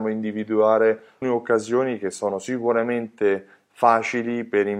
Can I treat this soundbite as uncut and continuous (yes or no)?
no